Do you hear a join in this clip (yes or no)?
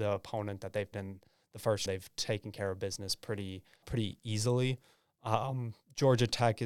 yes